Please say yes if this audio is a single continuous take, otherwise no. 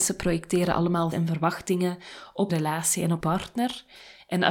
no